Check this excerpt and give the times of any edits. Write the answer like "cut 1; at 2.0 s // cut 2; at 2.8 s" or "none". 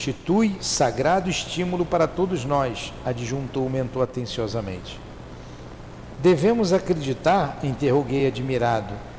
none